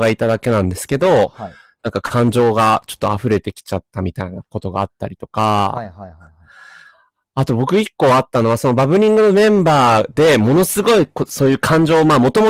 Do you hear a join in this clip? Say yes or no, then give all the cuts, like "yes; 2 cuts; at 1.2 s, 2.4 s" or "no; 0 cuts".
no; 0 cuts